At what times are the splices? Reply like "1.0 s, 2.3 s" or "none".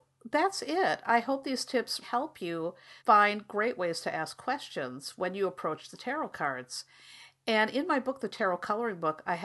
2.0 s, 3.0 s